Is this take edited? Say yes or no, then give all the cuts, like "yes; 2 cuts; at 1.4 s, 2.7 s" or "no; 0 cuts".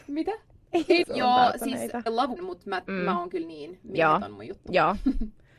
yes; 4 cuts; at 1.0 s, 2.1 s, 2.4 s, 3.8 s